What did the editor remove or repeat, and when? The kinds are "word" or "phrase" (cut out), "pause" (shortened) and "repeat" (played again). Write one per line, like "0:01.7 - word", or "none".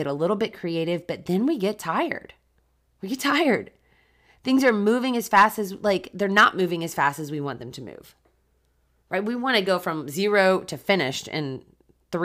none